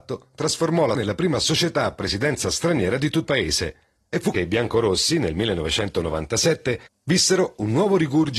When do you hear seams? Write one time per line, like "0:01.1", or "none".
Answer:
0:00.9
0:03.3
0:04.3